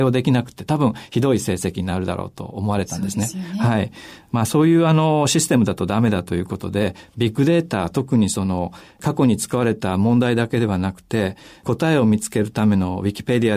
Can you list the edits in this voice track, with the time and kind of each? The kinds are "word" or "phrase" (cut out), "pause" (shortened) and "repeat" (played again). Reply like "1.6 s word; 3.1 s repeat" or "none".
none

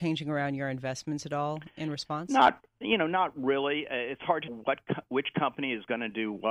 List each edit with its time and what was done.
4.5 s word

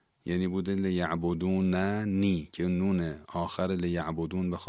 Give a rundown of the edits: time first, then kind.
none

